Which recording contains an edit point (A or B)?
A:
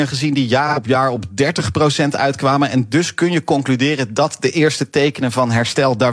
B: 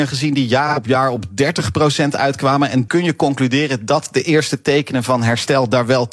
B